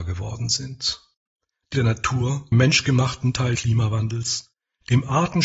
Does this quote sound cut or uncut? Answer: cut